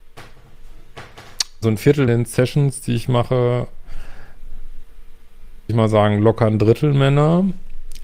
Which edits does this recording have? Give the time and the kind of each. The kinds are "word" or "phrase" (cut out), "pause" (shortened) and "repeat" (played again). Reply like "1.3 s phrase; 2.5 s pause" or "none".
1.6 s word; 2.1 s phrase; 5.7 s word